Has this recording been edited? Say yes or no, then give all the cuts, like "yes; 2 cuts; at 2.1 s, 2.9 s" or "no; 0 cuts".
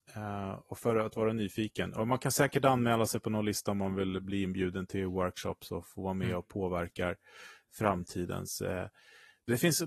no; 0 cuts